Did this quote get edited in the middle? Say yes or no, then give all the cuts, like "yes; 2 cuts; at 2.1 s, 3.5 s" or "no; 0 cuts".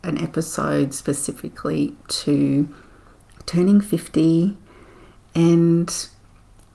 no; 0 cuts